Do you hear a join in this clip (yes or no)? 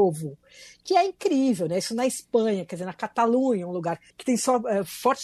yes